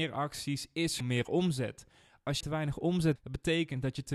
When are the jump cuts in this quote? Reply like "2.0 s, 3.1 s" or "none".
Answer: 1.0 s, 2.4 s, 3.2 s